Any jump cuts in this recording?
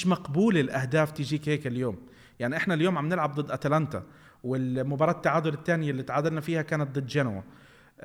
no; 0 cuts

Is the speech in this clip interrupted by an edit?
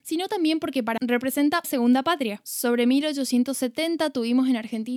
yes; 2 cuts; at 1.0 s, 1.6 s

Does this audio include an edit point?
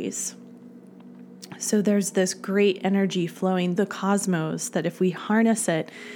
yes; 1 cut; at 3.8 s

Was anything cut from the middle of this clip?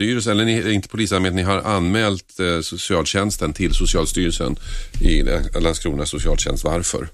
no; 0 cuts

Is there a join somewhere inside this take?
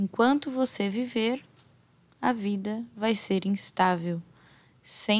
no; 0 cuts

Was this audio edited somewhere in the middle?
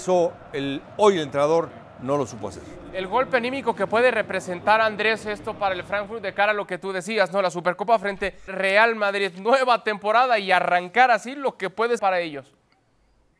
yes; 2 cuts; at 8.5 s, 12.0 s

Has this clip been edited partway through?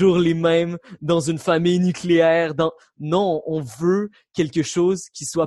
no; 0 cuts

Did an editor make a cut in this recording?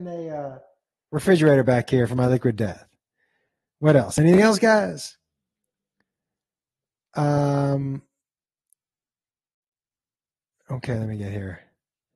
no; 0 cuts

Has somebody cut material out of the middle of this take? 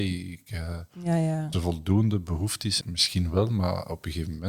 yes; 2 cuts; at 1.5 s, 2.8 s

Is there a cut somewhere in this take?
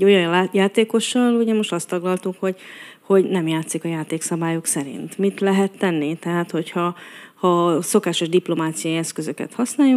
no; 0 cuts

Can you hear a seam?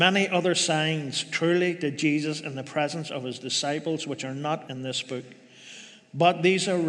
yes; 1 cut; at 4.7 s

